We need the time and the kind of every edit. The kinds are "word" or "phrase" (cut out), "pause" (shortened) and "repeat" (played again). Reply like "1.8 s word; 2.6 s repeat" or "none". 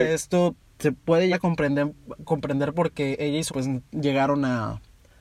1.3 s word; 3.5 s word